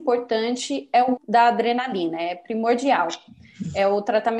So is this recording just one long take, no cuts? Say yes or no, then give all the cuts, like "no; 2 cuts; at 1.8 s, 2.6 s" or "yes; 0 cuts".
no; 1 cut; at 1.2 s